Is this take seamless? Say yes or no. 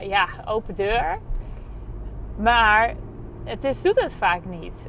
no